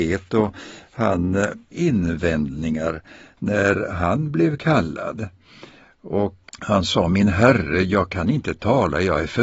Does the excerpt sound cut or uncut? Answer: cut